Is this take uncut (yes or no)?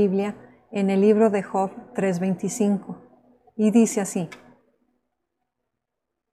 yes